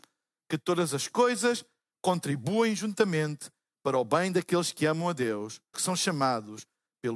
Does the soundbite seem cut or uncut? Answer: cut